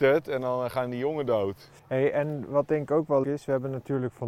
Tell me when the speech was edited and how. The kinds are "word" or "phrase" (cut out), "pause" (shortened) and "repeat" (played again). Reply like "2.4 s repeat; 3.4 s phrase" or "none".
1.8 s pause; 3.2 s word